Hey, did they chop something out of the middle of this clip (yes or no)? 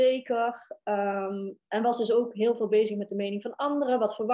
no